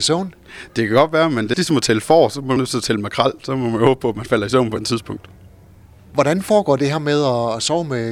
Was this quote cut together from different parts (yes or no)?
yes